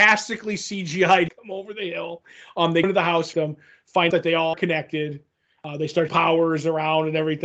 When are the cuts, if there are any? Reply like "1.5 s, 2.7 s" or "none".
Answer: 1.3 s, 2.8 s, 3.3 s, 4.1 s, 4.5 s, 6.1 s

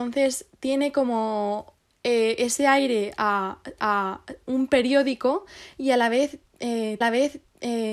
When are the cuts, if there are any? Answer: 3.8 s, 7.0 s

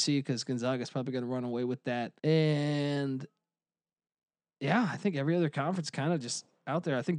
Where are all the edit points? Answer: 2.2 s

